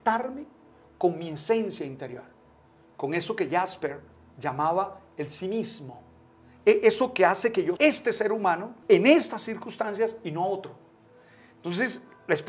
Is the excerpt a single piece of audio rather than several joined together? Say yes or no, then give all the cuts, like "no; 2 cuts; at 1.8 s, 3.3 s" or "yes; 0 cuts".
no; 2 cuts; at 7.8 s, 8.8 s